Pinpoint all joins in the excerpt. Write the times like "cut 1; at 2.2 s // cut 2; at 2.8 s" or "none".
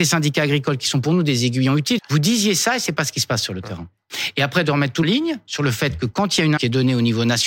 cut 1; at 2.0 s // cut 2; at 5.0 s // cut 3; at 6.6 s